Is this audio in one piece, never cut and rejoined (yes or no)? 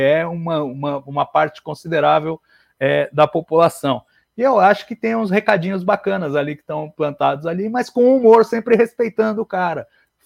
yes